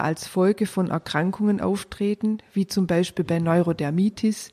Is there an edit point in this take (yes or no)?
no